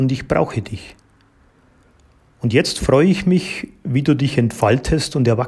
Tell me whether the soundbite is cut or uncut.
uncut